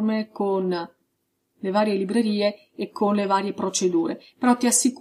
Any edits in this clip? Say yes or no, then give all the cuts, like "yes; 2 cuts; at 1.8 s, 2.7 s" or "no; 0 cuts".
no; 0 cuts